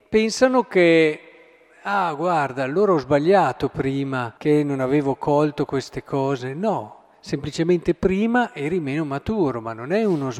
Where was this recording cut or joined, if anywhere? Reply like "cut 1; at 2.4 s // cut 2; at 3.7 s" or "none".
cut 1; at 4.4 s